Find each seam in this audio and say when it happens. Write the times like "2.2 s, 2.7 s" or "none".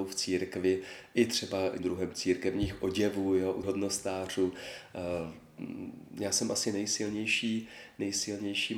1.8 s, 3.6 s